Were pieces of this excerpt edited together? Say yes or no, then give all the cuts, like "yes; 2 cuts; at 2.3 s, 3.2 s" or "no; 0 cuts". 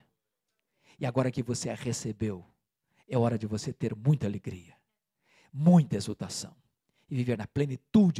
no; 0 cuts